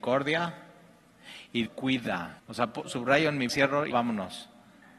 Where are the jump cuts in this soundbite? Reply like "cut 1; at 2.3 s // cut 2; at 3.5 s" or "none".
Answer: cut 1; at 1.7 s // cut 2; at 2.4 s // cut 3; at 2.8 s // cut 4; at 3.5 s // cut 5; at 3.9 s